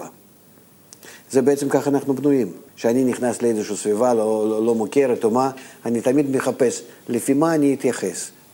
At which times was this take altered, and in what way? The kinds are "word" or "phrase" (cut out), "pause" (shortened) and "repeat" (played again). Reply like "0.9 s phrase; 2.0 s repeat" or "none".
2.7 s pause